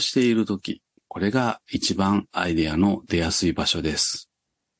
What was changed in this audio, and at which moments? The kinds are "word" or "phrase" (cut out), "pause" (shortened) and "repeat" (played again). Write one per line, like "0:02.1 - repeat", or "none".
0:01.0 - pause